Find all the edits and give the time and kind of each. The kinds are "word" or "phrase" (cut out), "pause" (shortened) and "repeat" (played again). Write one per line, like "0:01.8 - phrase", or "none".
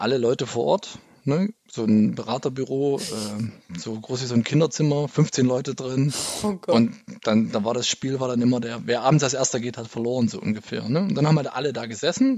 none